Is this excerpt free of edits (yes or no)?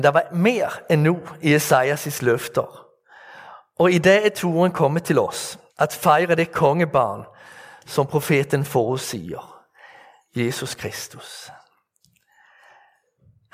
no